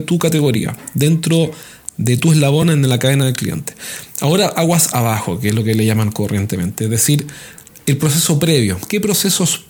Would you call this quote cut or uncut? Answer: uncut